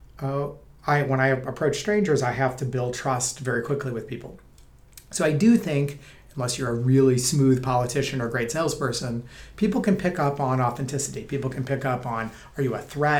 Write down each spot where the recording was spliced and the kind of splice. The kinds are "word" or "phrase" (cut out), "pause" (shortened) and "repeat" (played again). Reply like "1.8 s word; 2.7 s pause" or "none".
none